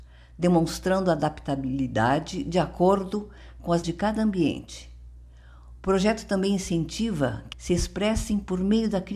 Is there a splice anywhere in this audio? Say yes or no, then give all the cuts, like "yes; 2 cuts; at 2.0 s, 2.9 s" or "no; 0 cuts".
yes; 2 cuts; at 3.8 s, 7.5 s